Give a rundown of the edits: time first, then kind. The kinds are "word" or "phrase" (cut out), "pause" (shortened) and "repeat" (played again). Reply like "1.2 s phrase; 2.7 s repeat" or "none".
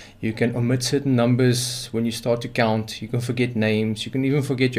none